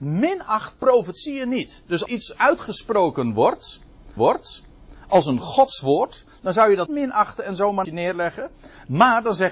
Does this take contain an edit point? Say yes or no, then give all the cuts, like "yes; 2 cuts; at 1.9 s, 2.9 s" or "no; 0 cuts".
yes; 4 cuts; at 2.1 s, 4.2 s, 6.9 s, 7.8 s